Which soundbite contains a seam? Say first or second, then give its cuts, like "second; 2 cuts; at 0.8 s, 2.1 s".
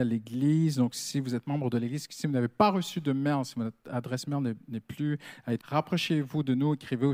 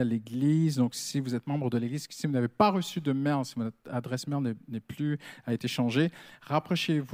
first; 1 cut; at 5.6 s